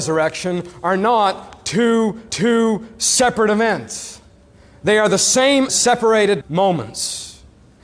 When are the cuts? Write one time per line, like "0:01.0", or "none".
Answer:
0:02.3
0:05.7
0:06.4